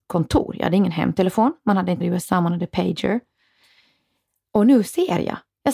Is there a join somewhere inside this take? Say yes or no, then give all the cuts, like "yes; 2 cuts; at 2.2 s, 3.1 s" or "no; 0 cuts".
yes; 1 cut; at 2.0 s